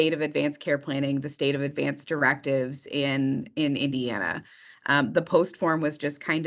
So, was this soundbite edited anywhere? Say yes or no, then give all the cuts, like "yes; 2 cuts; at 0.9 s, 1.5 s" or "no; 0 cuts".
no; 0 cuts